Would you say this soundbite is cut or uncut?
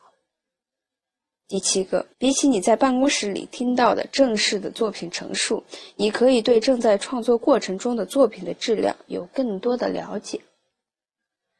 cut